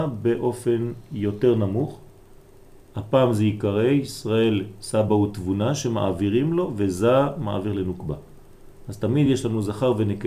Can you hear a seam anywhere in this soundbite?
no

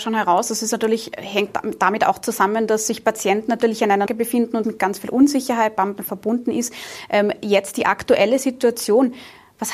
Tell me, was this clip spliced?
yes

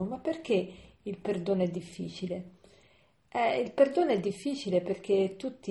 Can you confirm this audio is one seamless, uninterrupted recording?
yes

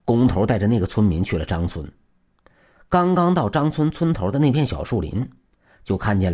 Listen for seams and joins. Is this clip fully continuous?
yes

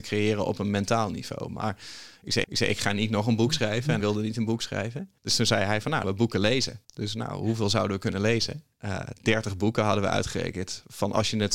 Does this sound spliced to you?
yes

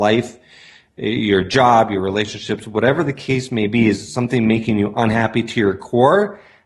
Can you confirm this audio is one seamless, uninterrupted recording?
yes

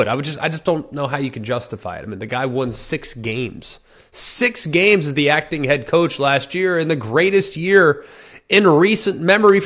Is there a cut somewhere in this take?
no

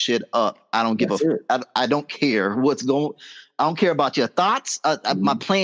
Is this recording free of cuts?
yes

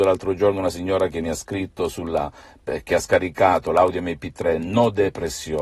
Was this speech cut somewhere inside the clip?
no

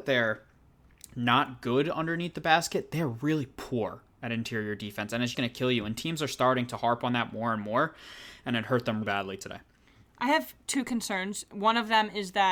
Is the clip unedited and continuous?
no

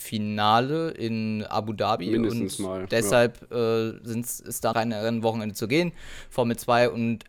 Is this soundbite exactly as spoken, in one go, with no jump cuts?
no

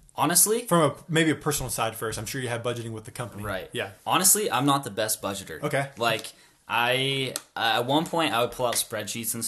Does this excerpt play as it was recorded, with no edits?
no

